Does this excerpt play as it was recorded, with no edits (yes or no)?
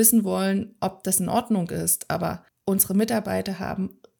no